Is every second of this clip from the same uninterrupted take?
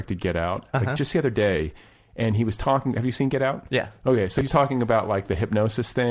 yes; 0 cuts

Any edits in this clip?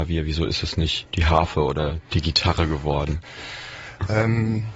no; 0 cuts

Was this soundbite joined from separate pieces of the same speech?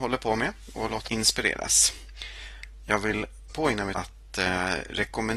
yes; 3 cuts; at 1.1 s, 3.5 s, 3.9 s

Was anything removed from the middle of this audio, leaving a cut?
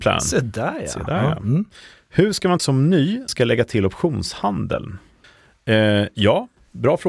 yes; 3 cuts; at 2.6 s, 3.3 s, 5.2 s

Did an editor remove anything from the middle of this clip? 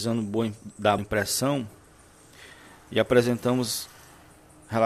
yes; 1 cut; at 1.0 s

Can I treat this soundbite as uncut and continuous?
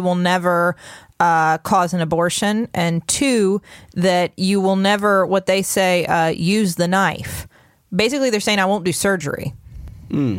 yes; 0 cuts

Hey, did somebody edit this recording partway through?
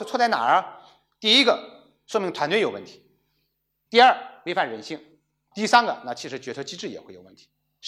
no; 0 cuts

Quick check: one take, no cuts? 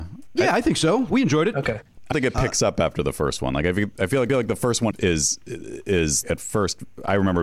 no; 4 cuts; at 2.1 s, 4.3 s, 4.9 s, 6.2 s

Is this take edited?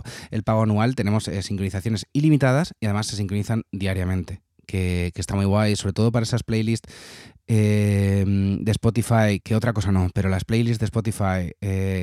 yes; 1 cut; at 9.4 s

